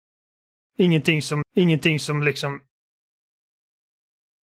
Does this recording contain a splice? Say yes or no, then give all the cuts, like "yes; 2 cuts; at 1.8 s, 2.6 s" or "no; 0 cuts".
yes; 1 cut; at 1.4 s